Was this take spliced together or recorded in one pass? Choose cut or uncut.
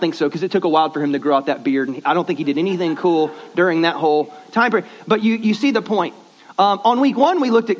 uncut